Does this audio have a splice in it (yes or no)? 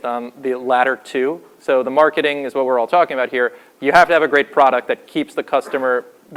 no